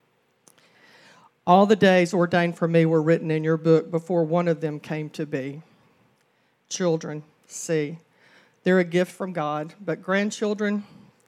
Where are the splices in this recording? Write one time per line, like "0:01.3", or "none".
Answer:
none